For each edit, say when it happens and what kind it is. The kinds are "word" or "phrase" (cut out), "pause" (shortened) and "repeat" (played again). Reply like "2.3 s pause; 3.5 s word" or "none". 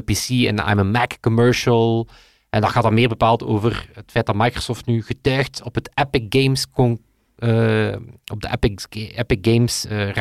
none